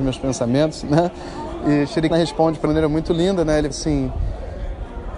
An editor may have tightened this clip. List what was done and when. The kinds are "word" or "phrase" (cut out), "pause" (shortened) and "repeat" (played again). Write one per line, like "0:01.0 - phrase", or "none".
0:02.1 - word
0:02.7 - phrase
0:03.7 - word